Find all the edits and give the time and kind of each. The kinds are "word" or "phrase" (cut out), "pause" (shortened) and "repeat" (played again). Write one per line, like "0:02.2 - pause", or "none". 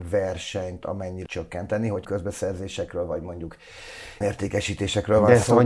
0:01.3 - word
0:02.0 - word
0:04.2 - word